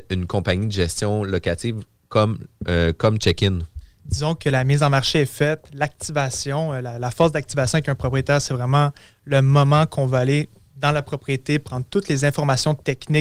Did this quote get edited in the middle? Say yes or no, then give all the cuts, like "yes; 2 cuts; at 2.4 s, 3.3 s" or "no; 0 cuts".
no; 0 cuts